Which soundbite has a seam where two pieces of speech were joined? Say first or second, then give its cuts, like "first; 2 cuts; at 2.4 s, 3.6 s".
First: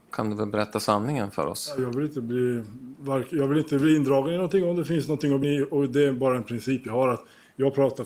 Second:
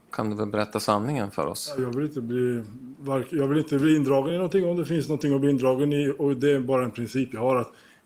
first; 1 cut; at 5.4 s